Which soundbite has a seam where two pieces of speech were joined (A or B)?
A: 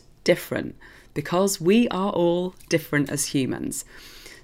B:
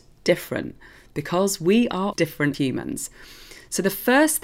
B